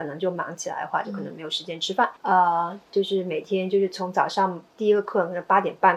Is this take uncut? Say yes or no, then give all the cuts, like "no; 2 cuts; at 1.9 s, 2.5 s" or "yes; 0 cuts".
no; 3 cuts; at 2.2 s, 2.9 s, 4.7 s